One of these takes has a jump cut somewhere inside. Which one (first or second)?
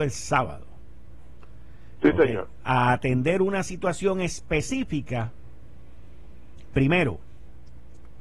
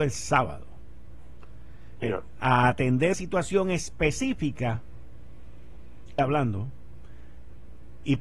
second